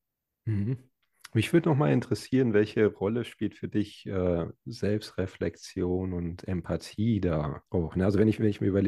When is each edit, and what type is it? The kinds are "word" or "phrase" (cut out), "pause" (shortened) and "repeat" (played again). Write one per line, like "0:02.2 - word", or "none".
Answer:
0:07.7 - pause